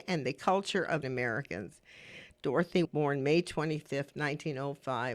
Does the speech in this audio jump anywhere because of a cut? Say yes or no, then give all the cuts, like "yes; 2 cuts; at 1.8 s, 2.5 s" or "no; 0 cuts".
yes; 2 cuts; at 1.0 s, 2.8 s